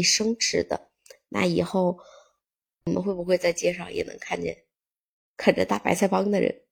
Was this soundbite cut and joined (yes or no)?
no